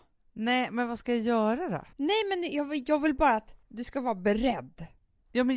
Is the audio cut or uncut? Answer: cut